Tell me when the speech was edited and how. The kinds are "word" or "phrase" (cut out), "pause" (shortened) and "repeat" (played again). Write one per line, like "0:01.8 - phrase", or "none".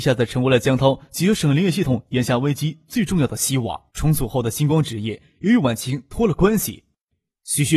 0:03.9 - pause